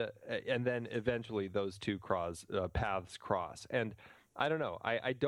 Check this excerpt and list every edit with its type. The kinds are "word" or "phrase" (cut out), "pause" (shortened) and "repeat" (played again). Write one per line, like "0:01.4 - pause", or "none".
none